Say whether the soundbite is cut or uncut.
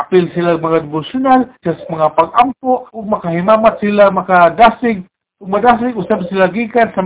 cut